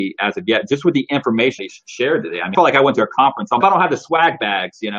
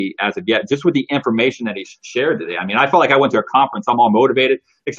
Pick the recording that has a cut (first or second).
first